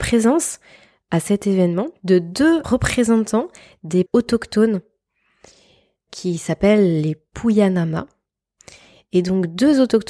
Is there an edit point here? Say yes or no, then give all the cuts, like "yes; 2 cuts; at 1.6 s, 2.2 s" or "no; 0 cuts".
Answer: yes; 3 cuts; at 2.6 s, 4.1 s, 6.1 s